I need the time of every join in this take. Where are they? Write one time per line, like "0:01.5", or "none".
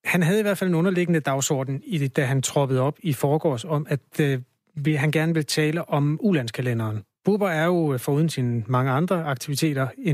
none